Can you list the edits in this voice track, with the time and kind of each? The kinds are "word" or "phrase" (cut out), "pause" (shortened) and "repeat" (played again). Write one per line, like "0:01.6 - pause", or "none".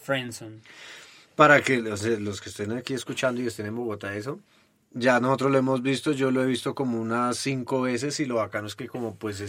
none